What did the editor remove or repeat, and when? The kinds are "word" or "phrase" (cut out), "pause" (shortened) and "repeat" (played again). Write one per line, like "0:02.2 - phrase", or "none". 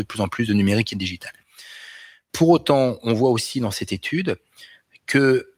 none